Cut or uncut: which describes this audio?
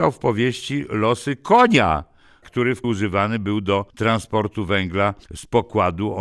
cut